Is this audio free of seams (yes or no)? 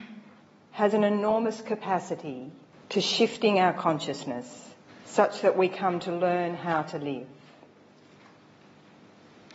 no